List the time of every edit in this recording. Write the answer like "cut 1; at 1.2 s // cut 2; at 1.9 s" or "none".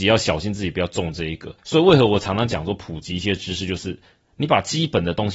cut 1; at 1.6 s